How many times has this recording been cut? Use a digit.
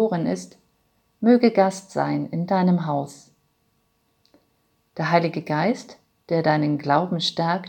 0